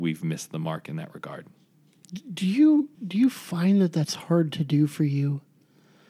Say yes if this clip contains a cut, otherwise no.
yes